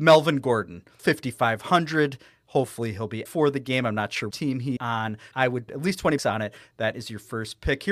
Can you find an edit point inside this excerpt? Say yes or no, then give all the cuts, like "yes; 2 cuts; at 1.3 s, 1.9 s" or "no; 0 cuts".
yes; 7 cuts; at 1.0 s, 3.3 s, 4.3 s, 4.8 s, 5.3 s, 5.7 s, 6.2 s